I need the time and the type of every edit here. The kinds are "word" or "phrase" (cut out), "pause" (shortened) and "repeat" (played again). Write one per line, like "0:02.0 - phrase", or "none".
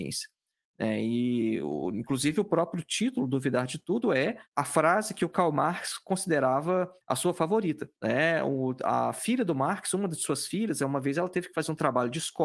0:04.5 - pause
0:07.0 - pause
0:08.0 - pause